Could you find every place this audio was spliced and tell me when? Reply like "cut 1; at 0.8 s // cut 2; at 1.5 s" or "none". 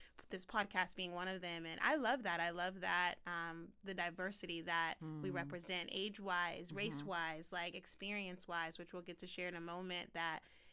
none